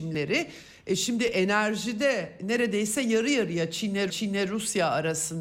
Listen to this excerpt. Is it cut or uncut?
cut